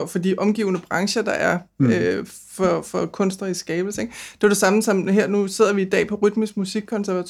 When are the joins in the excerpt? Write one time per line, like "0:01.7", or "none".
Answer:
none